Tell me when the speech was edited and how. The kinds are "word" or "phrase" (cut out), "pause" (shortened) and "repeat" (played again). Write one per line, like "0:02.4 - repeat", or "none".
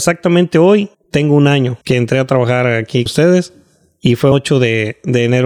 0:00.9 - pause
0:01.8 - pause
0:03.1 - word
0:04.3 - word